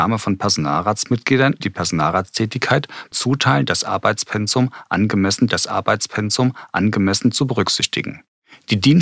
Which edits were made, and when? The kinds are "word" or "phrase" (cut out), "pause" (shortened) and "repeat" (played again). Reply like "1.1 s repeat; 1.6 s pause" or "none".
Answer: 1.6 s word; 3.1 s word; 5.5 s repeat